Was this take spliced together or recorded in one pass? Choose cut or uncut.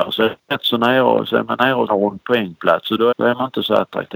cut